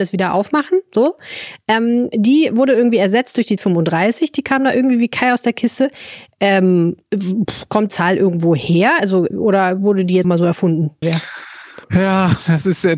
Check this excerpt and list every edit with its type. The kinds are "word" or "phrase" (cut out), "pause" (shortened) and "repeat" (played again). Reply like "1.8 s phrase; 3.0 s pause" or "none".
3.6 s word; 7.9 s word; 9.3 s word; 10.2 s word; 11.0 s phrase; 11.8 s pause